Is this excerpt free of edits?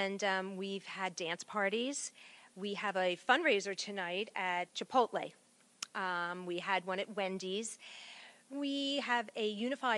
yes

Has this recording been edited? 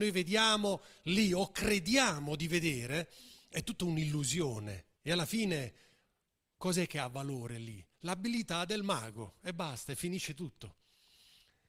yes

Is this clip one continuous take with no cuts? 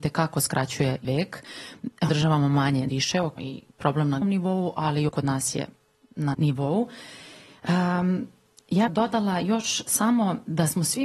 no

